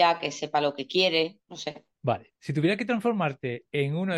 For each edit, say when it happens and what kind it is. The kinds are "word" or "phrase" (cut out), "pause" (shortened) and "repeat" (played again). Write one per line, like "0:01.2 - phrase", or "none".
0:01.4 - pause
0:01.9 - pause

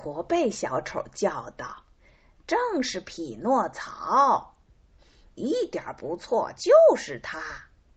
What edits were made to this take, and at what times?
none

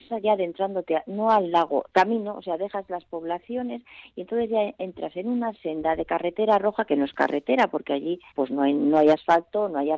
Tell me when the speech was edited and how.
0:08.3 - pause

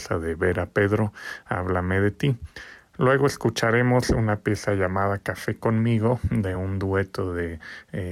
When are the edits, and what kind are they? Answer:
none

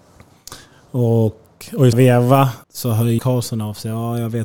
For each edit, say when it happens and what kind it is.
0:01.9 - word
0:02.6 - pause
0:03.2 - word

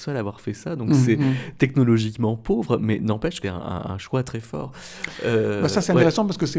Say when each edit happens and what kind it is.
0:03.4 - word

